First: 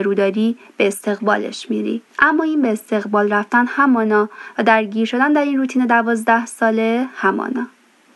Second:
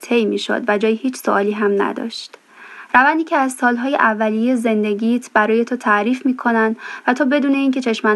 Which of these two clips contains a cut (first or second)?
first